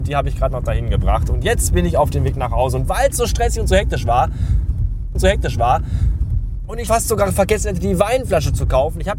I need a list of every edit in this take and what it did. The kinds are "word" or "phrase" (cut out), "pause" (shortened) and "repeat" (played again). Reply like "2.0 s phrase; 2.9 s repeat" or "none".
5.1 s repeat; 6.9 s word